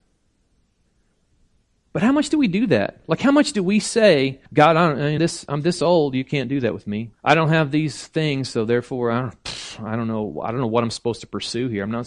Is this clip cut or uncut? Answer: cut